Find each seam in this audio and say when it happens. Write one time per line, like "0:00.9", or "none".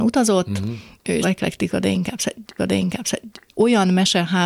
0:01.2
0:02.6